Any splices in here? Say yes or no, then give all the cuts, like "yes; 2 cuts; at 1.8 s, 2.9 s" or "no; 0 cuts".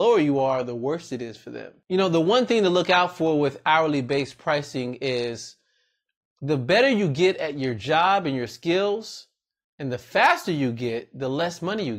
no; 0 cuts